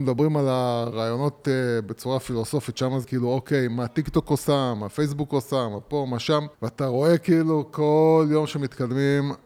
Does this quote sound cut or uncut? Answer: cut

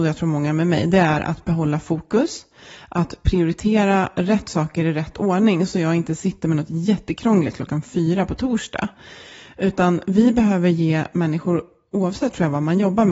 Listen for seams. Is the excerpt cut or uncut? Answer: uncut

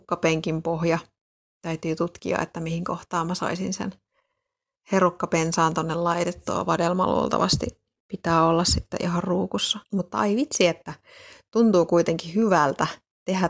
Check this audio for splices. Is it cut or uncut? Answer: cut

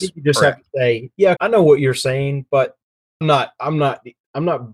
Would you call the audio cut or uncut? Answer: cut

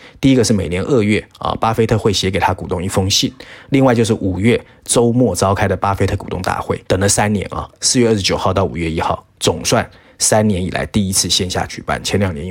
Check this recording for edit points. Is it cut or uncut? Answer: cut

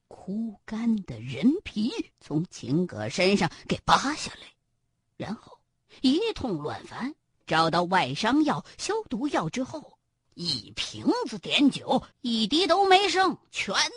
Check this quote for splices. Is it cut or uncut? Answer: cut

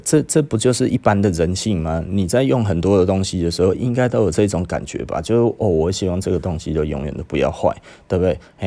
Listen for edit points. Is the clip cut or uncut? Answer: uncut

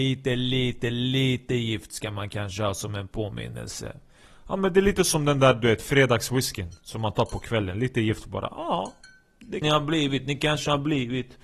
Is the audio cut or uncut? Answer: cut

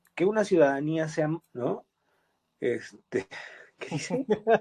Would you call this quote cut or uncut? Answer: cut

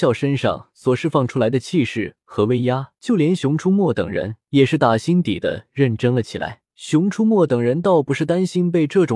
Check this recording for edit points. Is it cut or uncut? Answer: cut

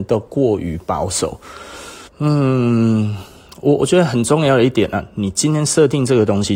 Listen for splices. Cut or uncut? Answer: cut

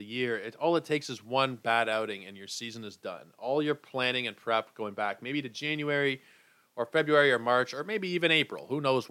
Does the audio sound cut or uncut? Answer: uncut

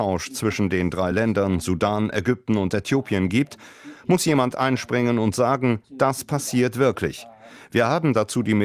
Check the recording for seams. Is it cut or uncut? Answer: uncut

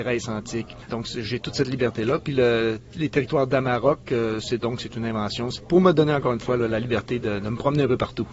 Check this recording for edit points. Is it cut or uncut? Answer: uncut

